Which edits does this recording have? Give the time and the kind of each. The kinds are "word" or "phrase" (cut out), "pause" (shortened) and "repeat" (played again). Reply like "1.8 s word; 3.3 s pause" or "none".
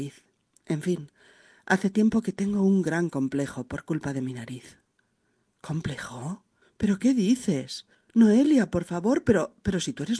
none

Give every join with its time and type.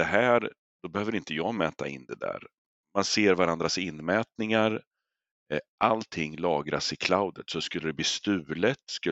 none

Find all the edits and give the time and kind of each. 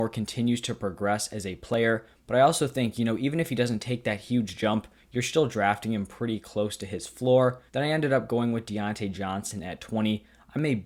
7.7 s pause

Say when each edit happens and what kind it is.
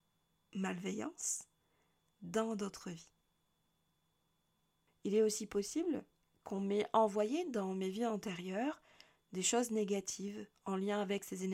none

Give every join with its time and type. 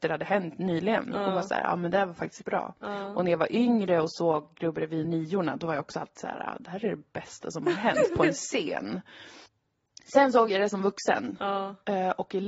2.4 s word; 5.0 s word; 9.5 s pause

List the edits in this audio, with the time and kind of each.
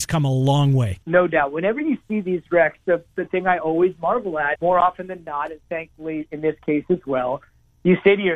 1.0 s pause; 4.6 s word

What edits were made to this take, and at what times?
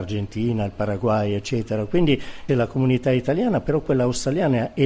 2.5 s word

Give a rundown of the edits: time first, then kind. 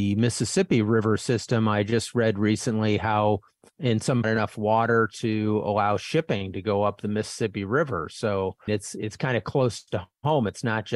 3.8 s phrase; 4.2 s phrase; 8.7 s phrase

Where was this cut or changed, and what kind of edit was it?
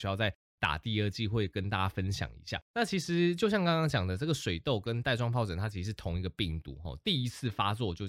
2.6 s pause

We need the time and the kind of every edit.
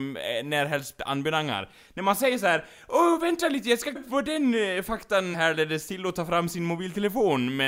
4.0 s word; 5.3 s word

